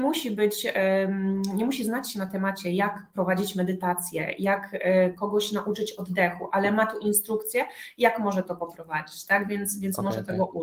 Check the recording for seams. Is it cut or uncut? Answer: uncut